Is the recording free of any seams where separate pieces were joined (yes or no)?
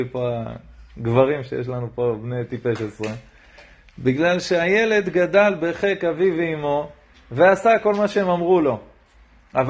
yes